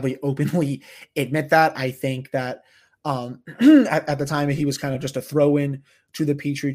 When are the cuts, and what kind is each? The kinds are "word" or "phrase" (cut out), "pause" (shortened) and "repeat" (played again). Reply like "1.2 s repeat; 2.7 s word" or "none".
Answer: none

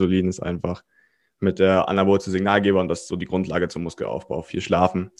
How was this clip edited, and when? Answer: none

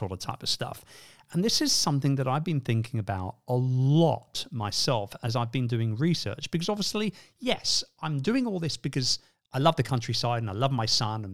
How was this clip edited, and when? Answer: none

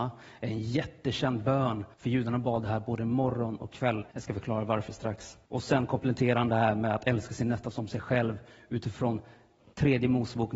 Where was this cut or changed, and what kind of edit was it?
1.9 s pause; 4.1 s pause; 5.4 s pause

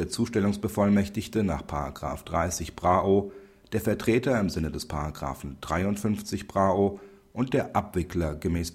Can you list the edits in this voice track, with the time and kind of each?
none

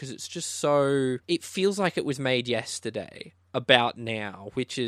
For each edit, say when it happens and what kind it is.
1.2 s pause

